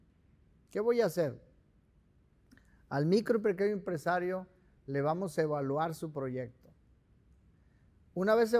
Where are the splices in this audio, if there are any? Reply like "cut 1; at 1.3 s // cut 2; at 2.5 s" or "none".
none